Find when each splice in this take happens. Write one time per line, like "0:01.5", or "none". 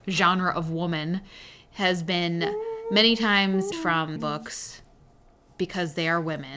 0:03.7
0:04.2